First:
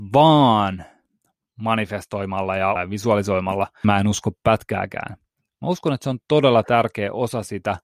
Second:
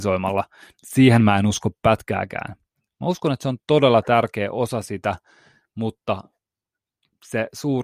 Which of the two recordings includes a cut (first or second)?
first